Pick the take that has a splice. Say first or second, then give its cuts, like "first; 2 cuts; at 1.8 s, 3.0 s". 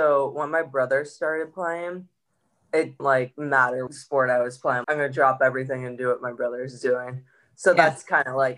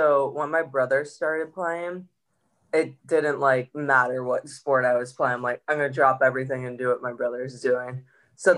first; 3 cuts; at 3.0 s, 3.9 s, 4.8 s